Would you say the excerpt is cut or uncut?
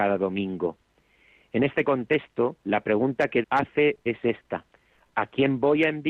cut